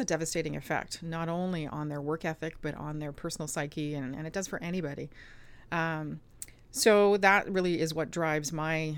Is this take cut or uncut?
uncut